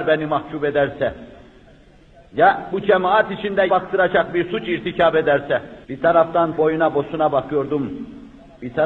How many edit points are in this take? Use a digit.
4